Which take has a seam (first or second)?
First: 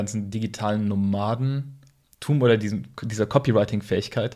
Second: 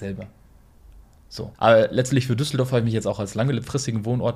second